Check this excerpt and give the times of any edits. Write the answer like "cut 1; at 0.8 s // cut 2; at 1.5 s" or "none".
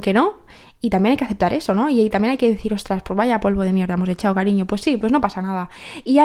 none